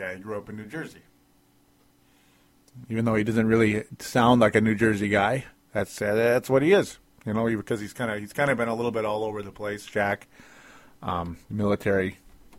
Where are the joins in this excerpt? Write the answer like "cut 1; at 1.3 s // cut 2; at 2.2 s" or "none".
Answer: none